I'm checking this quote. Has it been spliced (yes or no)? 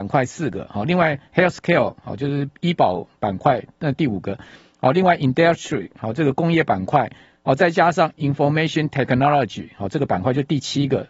no